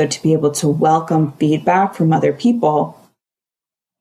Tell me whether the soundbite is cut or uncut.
uncut